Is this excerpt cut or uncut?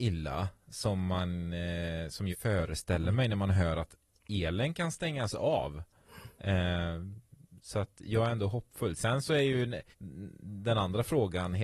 cut